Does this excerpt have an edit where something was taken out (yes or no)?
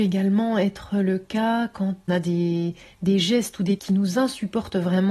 yes